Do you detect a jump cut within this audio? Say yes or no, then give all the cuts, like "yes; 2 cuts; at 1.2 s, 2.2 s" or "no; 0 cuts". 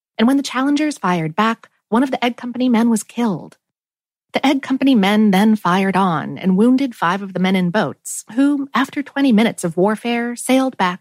no; 0 cuts